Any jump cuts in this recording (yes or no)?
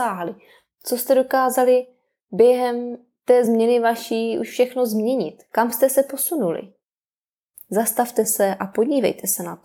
no